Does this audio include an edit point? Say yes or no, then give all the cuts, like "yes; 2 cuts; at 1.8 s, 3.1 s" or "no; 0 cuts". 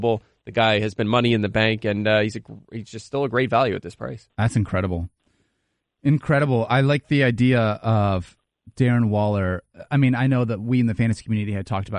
no; 0 cuts